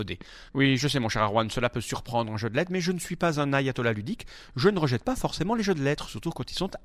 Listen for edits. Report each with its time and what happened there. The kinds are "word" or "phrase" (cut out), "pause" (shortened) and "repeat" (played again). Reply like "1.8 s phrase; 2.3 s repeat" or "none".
none